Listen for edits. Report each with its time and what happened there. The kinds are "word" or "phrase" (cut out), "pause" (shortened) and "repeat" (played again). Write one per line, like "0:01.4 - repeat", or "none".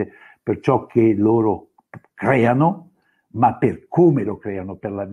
none